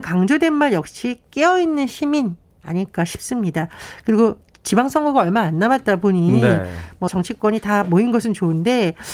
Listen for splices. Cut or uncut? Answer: cut